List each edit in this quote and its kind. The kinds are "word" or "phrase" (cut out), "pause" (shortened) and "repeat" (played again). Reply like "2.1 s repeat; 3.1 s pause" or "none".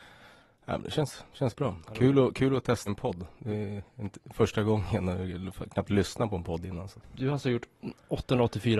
2.9 s phrase; 3.9 s pause